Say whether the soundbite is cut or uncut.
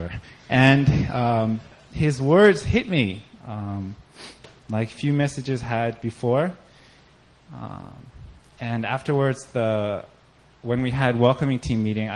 uncut